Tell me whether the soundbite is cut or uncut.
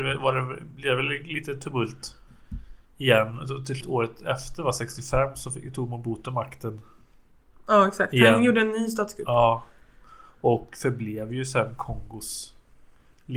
cut